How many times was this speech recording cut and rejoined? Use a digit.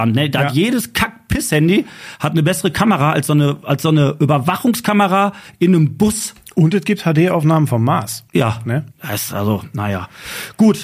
2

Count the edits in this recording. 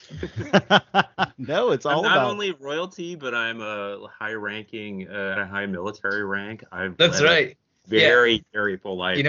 1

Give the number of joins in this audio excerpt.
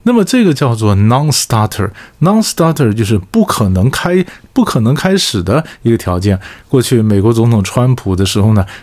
0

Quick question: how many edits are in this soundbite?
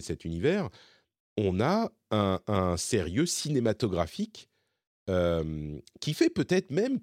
0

